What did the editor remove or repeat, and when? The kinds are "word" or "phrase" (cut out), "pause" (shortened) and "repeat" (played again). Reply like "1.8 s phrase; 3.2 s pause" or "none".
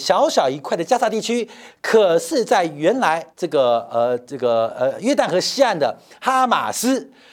1.7 s phrase; 3.3 s pause